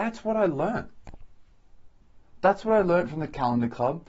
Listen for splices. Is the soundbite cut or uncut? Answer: uncut